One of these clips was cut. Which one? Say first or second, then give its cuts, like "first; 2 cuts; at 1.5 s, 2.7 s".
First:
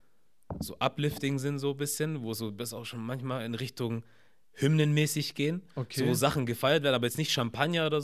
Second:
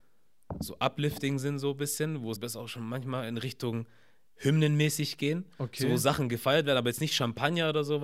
second; 1 cut; at 2.4 s